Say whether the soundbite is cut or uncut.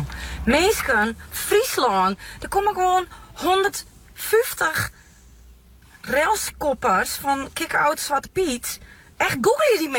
uncut